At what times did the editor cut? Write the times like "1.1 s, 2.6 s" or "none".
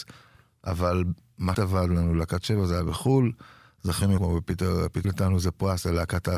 1.5 s, 4.2 s, 5.0 s

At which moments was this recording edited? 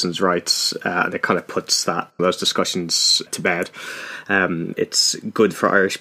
2.2 s, 3.3 s, 4.7 s

